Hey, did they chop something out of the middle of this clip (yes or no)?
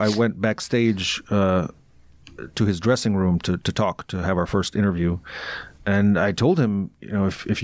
no